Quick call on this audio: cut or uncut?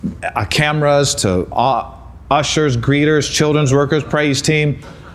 uncut